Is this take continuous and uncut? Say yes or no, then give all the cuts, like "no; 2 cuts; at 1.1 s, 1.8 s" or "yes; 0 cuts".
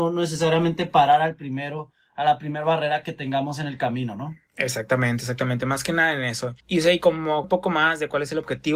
no; 2 cuts; at 6.6 s, 7.4 s